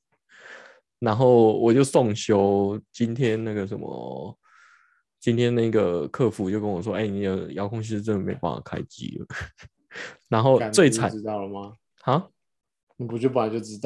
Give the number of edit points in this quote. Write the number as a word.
zero